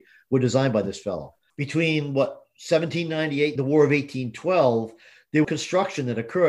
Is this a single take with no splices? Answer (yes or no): no